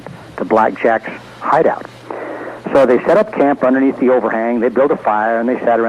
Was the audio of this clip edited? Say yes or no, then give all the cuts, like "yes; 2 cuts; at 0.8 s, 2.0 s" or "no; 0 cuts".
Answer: no; 0 cuts